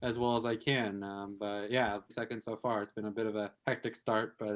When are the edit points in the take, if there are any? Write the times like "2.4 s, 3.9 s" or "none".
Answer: 2.1 s, 3.6 s

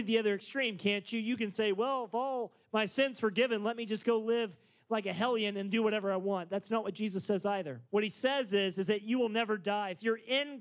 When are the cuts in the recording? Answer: 7.9 s

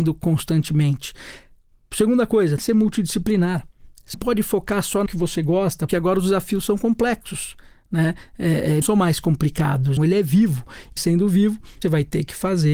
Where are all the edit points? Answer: 2.6 s, 4.1 s, 5.1 s, 5.9 s, 8.8 s, 10.0 s, 11.0 s, 11.8 s

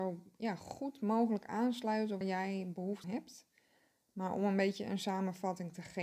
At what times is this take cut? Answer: 2.2 s, 3.0 s

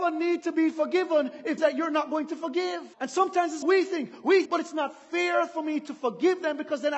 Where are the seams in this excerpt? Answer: 1.6 s, 2.9 s, 3.6 s, 4.5 s

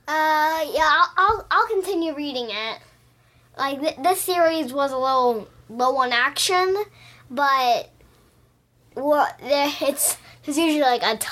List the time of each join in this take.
none

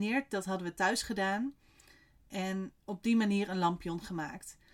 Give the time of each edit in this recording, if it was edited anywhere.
none

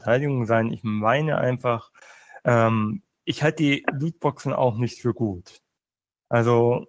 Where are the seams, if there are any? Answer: none

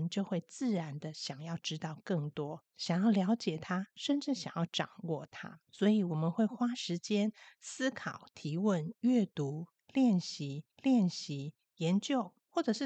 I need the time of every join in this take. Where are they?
5.6 s, 10.7 s

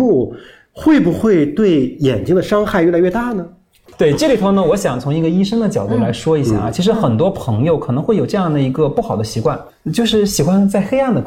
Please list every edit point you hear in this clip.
none

